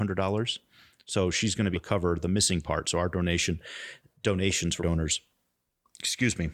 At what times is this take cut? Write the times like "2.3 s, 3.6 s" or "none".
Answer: 1.7 s, 4.8 s